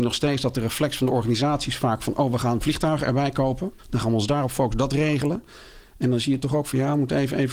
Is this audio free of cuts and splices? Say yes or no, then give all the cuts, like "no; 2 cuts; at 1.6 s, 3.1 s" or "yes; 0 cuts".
no; 1 cut; at 3.8 s